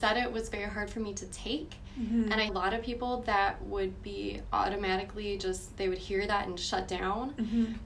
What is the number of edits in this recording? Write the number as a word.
one